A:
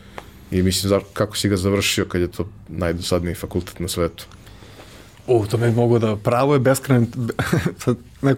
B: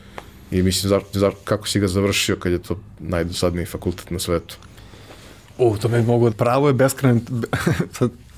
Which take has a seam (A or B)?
B